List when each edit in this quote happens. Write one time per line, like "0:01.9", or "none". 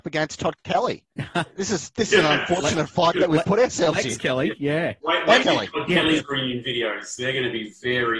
0:01.1
0:05.4